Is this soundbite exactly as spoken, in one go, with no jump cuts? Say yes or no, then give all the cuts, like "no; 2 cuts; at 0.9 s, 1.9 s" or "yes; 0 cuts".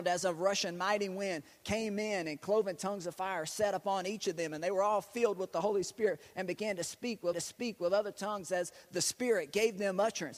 no; 1 cut; at 7.3 s